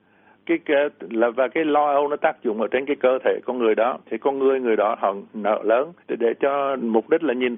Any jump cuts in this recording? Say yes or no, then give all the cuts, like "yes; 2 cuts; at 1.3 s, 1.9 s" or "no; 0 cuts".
yes; 2 cuts; at 4.0 s, 6.0 s